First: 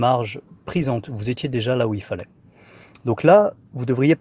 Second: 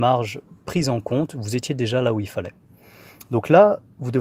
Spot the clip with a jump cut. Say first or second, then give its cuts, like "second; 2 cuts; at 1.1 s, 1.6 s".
first; 1 cut; at 1.0 s